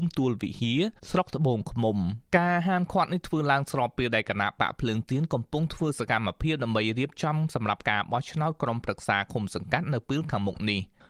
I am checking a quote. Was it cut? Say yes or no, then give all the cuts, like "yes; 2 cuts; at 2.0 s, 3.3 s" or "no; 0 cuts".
yes; 2 cuts; at 1.0 s, 2.2 s